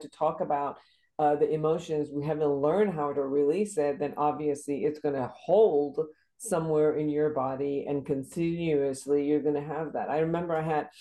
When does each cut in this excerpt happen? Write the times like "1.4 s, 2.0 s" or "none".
3.1 s